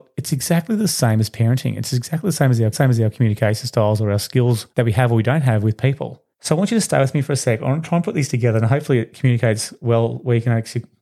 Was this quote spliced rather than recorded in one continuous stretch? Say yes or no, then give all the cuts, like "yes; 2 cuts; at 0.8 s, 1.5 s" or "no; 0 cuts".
yes; 3 cuts; at 2.7 s, 4.7 s, 6.3 s